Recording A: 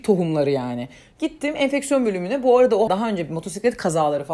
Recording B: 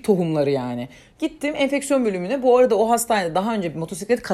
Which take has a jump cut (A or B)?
A